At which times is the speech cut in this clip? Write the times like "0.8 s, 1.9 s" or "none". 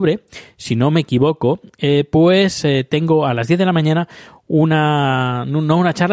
none